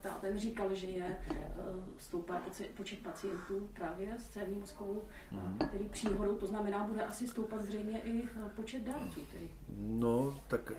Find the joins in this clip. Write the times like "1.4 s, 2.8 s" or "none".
none